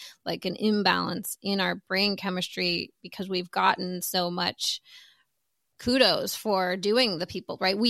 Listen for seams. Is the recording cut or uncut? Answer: uncut